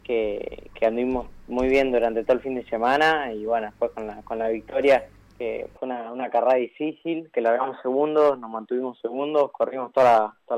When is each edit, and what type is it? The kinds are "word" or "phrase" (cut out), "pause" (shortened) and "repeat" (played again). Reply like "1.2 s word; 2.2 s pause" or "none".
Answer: 5.2 s pause

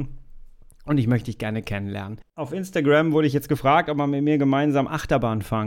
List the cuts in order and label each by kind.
none

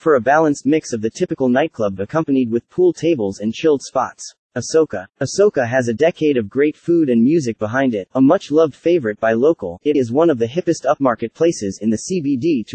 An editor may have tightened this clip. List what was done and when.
2.0 s word; 4.4 s pause; 9.9 s word

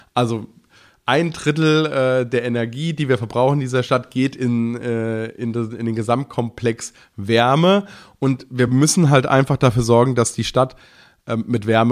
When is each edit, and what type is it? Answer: none

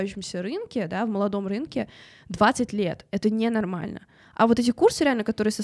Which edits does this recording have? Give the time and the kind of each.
none

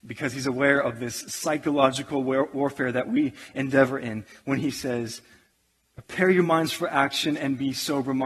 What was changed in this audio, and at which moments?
none

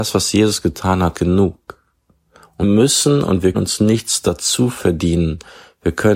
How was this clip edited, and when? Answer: 1.1 s word; 2.6 s word; 3.5 s word

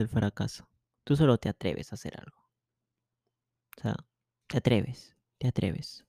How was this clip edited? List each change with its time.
none

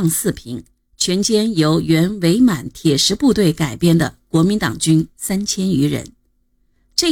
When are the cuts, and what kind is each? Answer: none

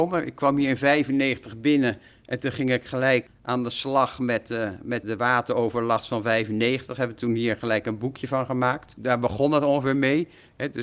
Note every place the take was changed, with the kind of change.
3.3 s word; 5.0 s word

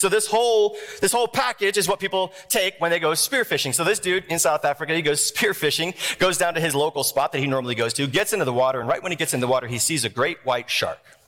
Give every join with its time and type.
none

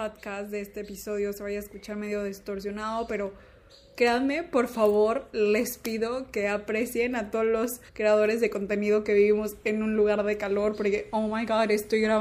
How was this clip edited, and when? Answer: 7.9 s pause

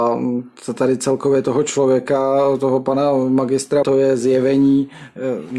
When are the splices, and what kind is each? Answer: 3.8 s phrase

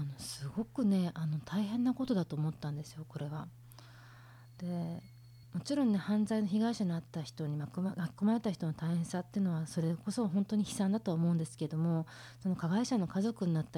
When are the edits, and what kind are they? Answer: 5.4 s pause

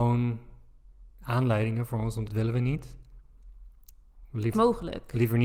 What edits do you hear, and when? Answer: 1.1 s pause; 2.3 s phrase; 4.5 s phrase

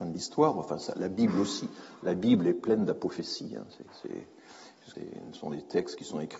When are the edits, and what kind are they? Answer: 4.9 s word

